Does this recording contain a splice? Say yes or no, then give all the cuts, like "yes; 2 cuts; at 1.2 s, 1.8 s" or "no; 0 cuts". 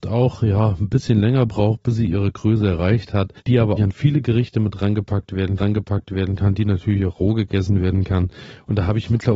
yes; 3 cuts; at 3.4 s, 3.8 s, 5.6 s